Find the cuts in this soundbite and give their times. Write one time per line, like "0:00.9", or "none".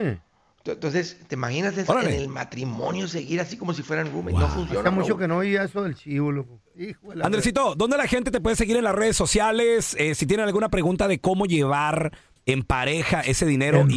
none